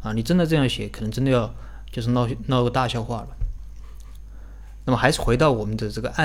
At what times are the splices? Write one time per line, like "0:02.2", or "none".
none